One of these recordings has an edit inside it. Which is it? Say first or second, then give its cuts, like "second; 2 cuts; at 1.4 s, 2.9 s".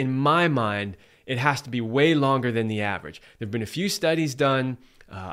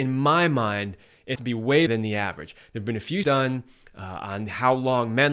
second; 3 cuts; at 1.4 s, 1.9 s, 3.2 s